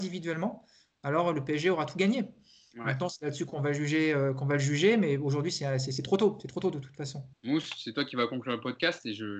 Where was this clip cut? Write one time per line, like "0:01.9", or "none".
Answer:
0:07.3